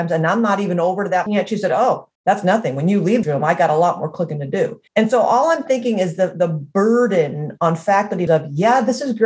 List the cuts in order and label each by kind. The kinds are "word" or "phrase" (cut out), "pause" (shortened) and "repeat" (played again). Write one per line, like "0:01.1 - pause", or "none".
0:01.3 - word
0:02.1 - pause
0:03.2 - word
0:04.9 - pause
0:08.3 - word